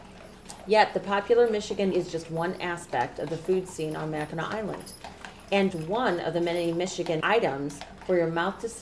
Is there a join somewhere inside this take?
yes; 3 cuts; at 1.9 s, 5.7 s, 7.2 s

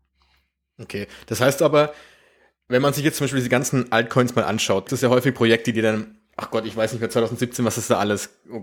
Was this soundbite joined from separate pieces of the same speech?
yes; 1 cut; at 4.9 s

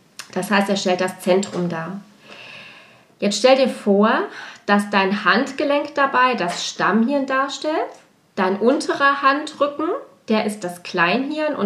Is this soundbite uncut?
yes; 0 cuts

